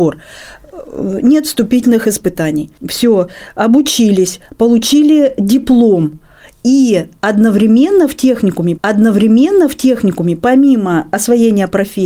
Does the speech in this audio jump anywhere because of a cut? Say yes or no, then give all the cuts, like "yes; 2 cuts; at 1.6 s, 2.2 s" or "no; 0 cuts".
yes; 2 cuts; at 2.8 s, 8.8 s